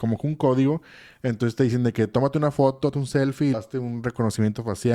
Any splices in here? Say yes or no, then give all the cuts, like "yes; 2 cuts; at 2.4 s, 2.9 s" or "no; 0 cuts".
yes; 2 cuts; at 2.9 s, 3.5 s